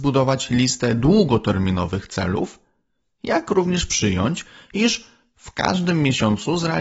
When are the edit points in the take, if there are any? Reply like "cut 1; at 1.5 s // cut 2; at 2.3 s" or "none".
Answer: none